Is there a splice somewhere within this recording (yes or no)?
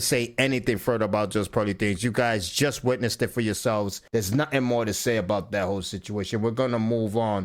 yes